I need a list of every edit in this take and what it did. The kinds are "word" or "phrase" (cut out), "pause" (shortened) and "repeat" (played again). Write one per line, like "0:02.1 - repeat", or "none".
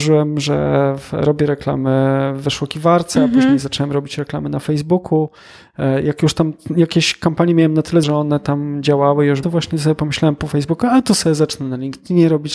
0:08.0 - word
0:09.4 - phrase